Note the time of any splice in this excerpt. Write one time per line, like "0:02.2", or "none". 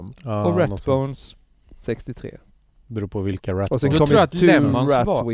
none